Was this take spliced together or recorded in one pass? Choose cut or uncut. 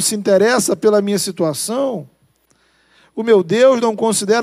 uncut